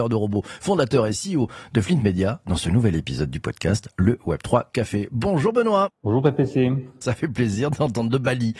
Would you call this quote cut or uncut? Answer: uncut